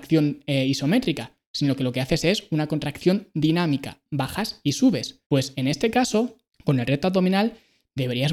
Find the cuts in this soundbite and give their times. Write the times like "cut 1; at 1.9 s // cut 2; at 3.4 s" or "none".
cut 1; at 5.2 s // cut 2; at 6.5 s